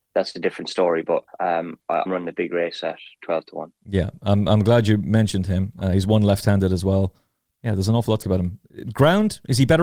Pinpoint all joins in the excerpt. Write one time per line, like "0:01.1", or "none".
0:01.3
0:02.1
0:03.8
0:08.2